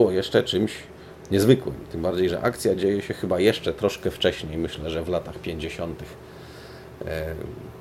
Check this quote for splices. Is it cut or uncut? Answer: uncut